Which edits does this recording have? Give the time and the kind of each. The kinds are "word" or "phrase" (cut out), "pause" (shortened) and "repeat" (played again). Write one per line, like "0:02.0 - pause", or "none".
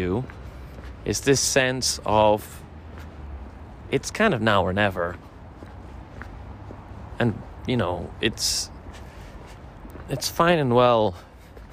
none

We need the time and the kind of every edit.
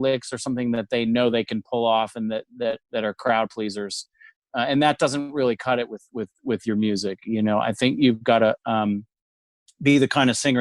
none

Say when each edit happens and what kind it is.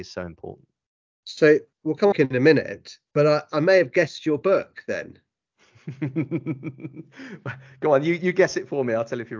0:01.7 - pause
0:02.1 - phrase
0:03.1 - pause

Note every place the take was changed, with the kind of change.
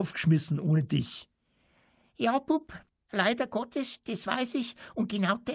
none

